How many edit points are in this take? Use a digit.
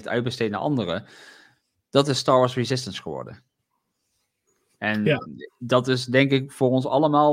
0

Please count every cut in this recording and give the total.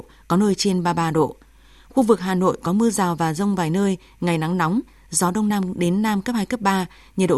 0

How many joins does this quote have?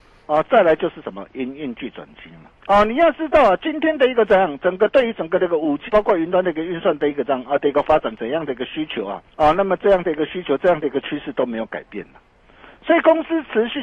3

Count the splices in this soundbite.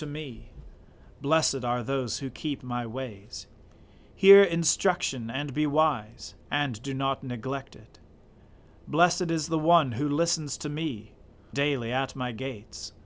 2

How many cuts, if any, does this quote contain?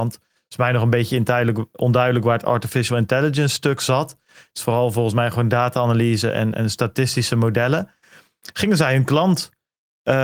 1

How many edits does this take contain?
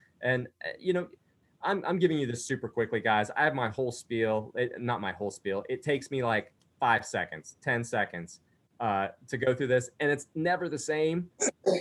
0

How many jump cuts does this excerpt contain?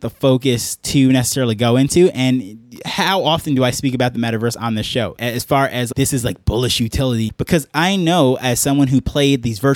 0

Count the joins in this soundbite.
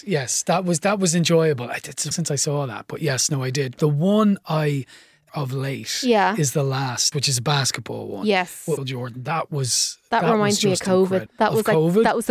5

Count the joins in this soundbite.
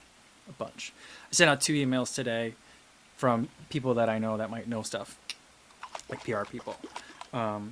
0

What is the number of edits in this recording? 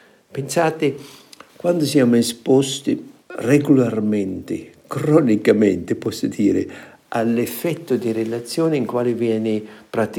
2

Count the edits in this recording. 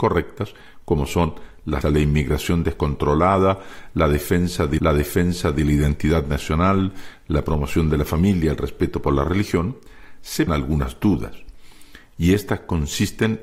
3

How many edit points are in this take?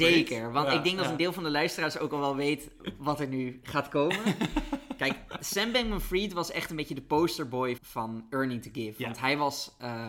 1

